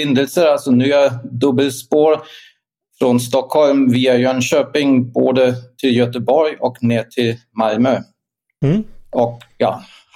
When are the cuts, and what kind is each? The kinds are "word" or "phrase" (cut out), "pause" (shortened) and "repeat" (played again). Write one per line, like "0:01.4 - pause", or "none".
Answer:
none